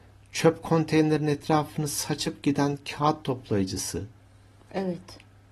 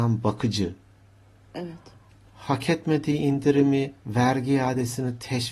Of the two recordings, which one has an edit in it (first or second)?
second